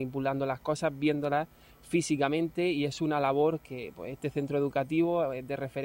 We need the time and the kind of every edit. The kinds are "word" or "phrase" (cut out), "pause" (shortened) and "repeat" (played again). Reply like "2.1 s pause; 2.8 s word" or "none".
none